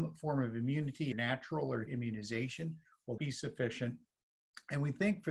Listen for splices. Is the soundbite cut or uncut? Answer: cut